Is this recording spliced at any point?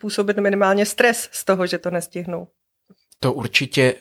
no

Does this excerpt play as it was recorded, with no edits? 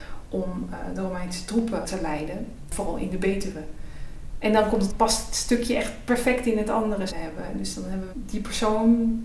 no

